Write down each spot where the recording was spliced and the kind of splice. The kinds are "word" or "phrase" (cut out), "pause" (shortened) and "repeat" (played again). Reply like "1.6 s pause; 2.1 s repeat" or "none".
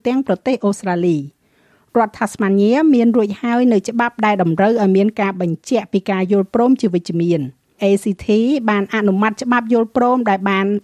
7.8 s phrase